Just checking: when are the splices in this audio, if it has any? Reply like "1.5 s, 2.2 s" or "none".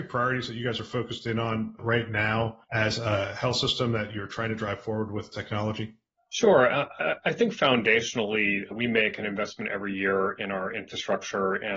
2.6 s, 6.1 s